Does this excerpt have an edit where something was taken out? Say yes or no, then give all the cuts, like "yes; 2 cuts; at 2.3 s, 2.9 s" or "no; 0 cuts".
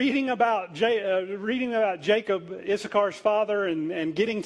no; 0 cuts